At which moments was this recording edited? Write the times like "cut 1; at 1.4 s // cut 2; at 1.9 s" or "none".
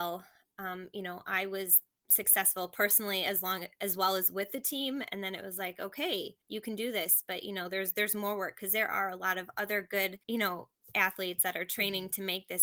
cut 1; at 6.4 s // cut 2; at 10.2 s